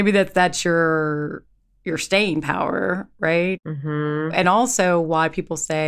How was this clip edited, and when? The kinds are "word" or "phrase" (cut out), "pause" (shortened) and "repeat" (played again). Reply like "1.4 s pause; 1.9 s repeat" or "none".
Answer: none